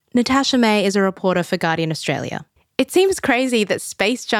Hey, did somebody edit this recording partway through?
yes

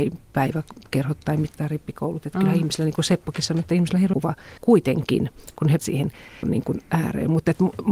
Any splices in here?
yes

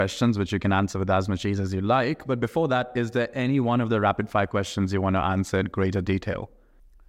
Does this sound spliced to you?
no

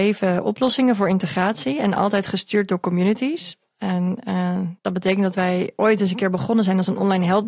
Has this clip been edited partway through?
yes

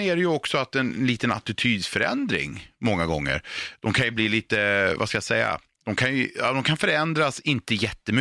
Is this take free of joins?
yes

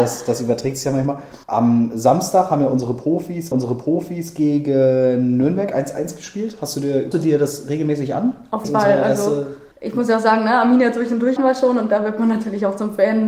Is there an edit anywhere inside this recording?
yes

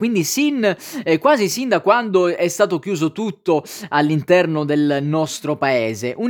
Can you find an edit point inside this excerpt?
no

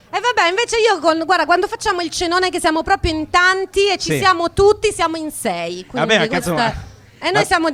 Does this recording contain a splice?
no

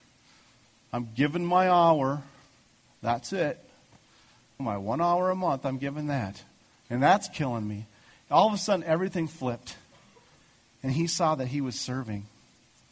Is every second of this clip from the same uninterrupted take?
no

